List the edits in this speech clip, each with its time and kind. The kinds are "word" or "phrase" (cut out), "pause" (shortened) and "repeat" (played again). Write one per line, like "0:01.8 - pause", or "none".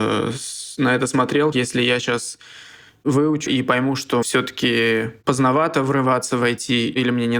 0:01.5 - word
0:03.5 - word
0:04.2 - word